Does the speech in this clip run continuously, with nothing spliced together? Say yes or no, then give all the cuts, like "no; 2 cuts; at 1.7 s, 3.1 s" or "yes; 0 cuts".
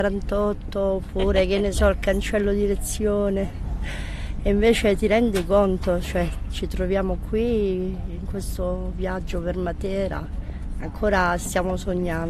yes; 0 cuts